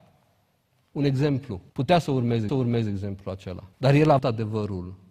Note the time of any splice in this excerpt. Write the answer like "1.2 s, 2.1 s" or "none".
1.7 s, 2.5 s, 3.7 s, 4.2 s